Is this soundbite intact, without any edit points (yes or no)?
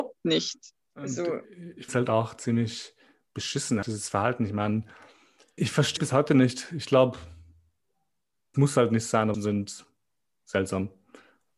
no